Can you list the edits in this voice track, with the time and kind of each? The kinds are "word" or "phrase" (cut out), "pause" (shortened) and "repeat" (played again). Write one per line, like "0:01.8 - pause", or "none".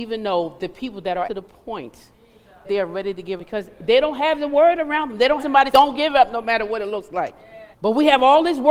0:01.2 - word
0:02.6 - word
0:03.4 - word
0:05.4 - word
0:05.7 - word
0:07.7 - pause